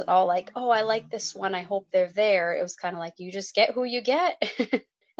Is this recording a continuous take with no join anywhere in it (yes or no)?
yes